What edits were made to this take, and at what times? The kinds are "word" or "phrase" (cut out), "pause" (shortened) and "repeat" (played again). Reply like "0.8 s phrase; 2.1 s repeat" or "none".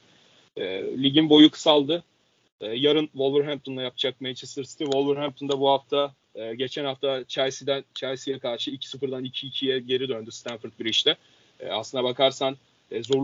6.2 s pause